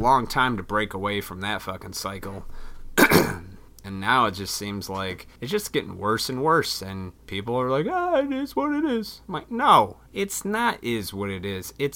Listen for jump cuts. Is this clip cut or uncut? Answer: cut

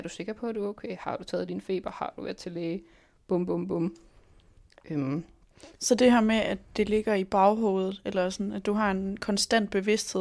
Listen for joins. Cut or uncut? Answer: uncut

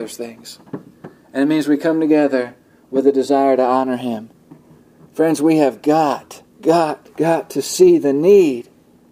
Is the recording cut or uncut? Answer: cut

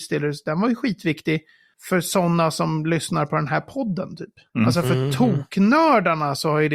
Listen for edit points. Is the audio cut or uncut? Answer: uncut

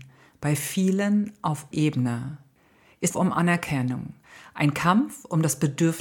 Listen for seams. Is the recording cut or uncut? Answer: cut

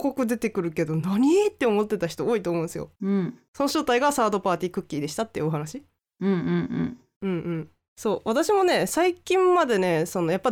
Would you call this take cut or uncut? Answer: cut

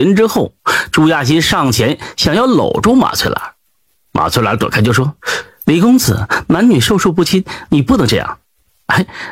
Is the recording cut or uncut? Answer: cut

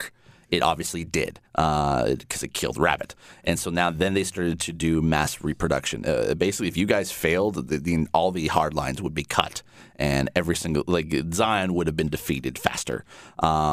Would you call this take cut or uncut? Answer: cut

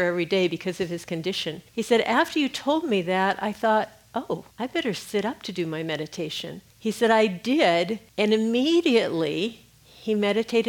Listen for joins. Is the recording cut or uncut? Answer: cut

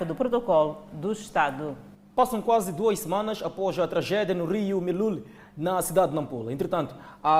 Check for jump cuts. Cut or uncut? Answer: uncut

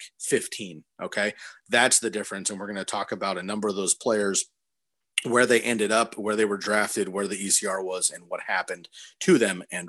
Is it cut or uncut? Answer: uncut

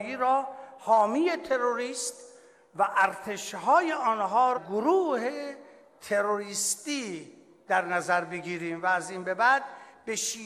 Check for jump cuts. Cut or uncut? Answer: cut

